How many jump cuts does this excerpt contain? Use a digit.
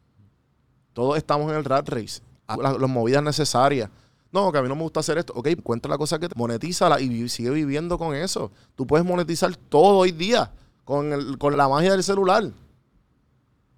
4